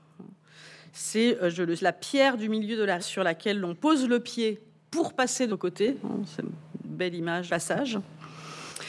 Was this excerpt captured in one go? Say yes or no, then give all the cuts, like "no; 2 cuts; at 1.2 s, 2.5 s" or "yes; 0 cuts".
no; 4 cuts; at 1.8 s, 3.0 s, 5.5 s, 7.5 s